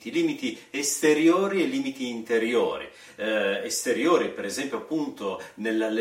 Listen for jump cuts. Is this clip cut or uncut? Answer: uncut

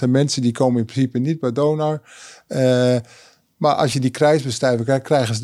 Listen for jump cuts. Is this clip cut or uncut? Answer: uncut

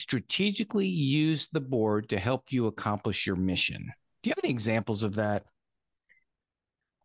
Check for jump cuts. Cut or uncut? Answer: uncut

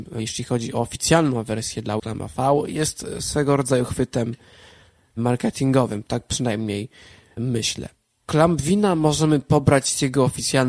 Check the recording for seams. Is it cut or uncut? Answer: cut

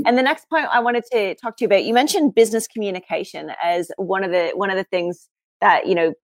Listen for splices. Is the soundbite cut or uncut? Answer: uncut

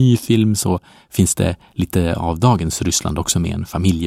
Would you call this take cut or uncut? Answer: uncut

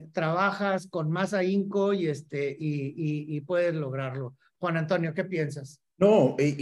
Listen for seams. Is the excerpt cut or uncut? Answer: uncut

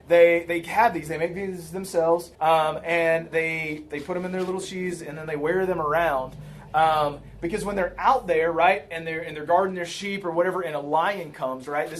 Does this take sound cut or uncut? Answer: cut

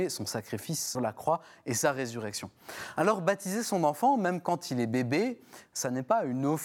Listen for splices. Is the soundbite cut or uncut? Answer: cut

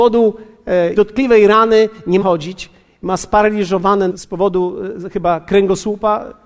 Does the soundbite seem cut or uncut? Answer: cut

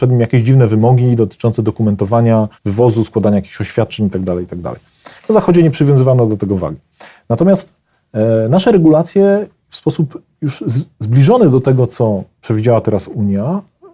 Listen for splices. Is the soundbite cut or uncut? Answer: cut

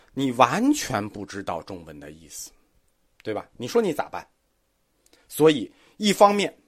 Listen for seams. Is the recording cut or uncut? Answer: uncut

